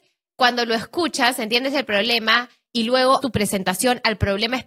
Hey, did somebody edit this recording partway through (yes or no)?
yes